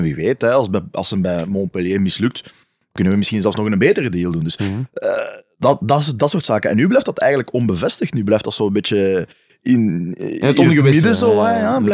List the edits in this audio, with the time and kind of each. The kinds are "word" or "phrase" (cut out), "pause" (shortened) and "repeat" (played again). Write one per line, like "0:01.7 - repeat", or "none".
none